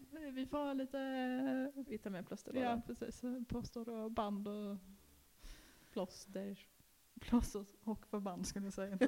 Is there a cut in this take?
no; 0 cuts

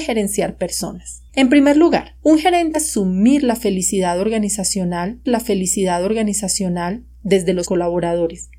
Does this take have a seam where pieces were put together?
yes; 5 cuts; at 1.3 s, 2.2 s, 2.7 s, 5.3 s, 7.6 s

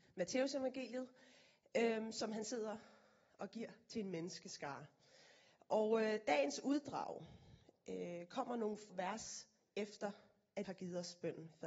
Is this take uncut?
no; 2 cuts; at 8.9 s, 10.6 s

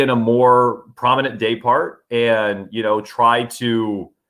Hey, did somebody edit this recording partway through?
no; 0 cuts

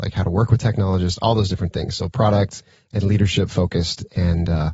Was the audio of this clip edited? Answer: no; 0 cuts

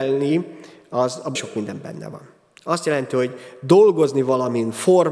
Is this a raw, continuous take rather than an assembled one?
no; 1 cut; at 1.4 s

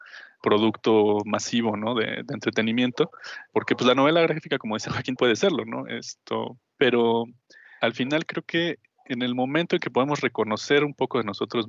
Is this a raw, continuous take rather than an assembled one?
no; 1 cut; at 5.2 s

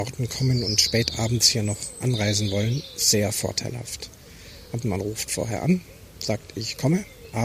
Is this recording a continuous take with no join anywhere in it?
no; 1 cut; at 4.8 s

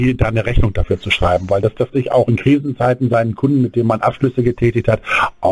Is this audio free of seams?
no; 2 cuts; at 1.9 s, 2.3 s

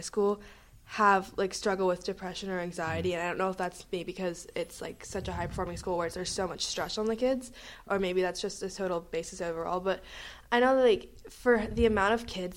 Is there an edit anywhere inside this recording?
no; 0 cuts

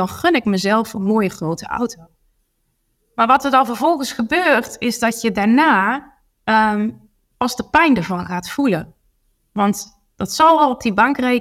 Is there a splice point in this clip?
no; 0 cuts

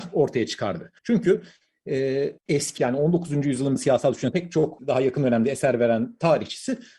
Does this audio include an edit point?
yes; 6 cuts; at 1.0 s, 2.4 s, 2.8 s, 3.8 s, 4.3 s, 4.8 s

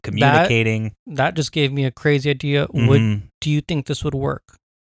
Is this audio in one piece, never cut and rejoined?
yes; 0 cuts

